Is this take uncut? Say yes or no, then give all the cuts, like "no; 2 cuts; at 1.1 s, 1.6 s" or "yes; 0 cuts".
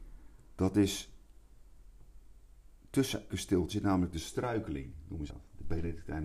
no; 3 cuts; at 3.3 s, 3.7 s, 5.3 s